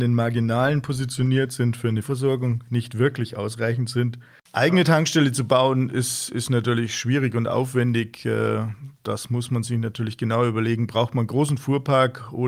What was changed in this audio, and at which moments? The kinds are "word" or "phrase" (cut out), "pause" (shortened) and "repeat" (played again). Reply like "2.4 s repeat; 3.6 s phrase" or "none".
2.0 s word